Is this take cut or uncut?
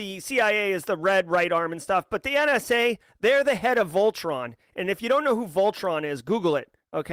uncut